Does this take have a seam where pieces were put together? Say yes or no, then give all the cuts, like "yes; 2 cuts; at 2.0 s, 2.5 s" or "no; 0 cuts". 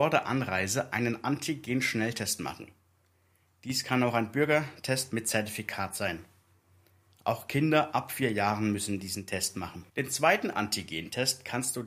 yes; 1 cut; at 9.9 s